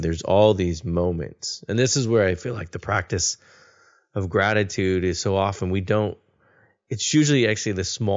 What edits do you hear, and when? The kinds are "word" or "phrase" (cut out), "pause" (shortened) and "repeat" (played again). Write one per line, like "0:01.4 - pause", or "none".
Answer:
none